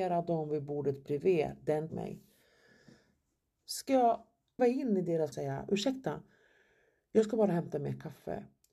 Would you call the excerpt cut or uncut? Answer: cut